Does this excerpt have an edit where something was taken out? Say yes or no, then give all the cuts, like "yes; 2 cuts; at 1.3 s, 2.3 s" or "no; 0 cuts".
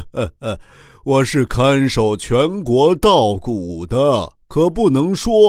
yes; 1 cut; at 4.4 s